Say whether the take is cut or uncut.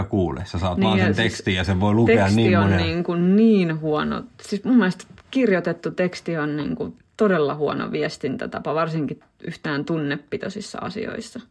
cut